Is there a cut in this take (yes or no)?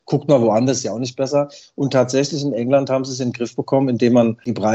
no